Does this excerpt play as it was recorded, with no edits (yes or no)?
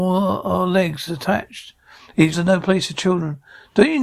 no